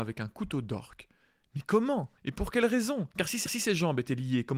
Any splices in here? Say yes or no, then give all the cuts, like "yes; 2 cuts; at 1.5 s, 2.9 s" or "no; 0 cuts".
yes; 3 cuts; at 2.2 s, 3.1 s, 3.5 s